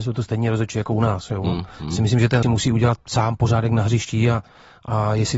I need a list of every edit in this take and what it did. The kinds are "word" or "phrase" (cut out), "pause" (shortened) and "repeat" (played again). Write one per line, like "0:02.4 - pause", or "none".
0:02.4 - phrase